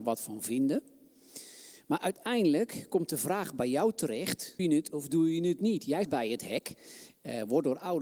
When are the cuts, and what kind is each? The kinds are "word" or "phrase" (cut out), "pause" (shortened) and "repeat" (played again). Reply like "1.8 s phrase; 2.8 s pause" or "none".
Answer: 4.6 s word; 6.0 s word